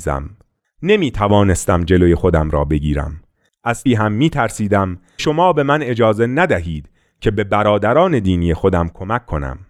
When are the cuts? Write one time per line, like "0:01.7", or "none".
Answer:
0:03.9
0:05.2